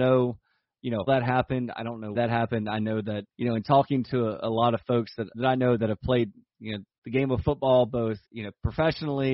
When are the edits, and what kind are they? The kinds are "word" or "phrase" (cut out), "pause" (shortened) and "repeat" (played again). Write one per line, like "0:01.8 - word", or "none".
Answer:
0:01.1 - word
0:02.1 - word
0:03.3 - pause
0:05.3 - word
0:06.9 - pause
0:08.2 - pause